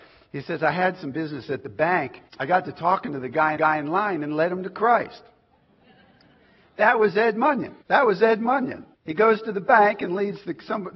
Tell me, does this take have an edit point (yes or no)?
yes